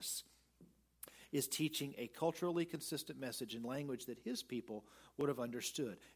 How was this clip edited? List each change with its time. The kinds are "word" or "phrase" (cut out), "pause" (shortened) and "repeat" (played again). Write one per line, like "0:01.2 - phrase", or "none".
none